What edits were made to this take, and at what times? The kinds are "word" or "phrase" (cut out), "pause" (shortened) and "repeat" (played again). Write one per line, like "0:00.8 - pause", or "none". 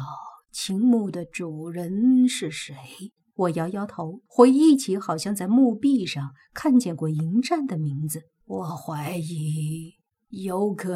0:03.2 - pause
0:04.3 - pause
0:08.4 - pause